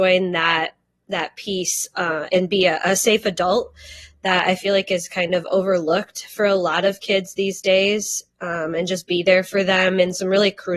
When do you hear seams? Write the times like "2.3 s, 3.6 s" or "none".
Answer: 2.3 s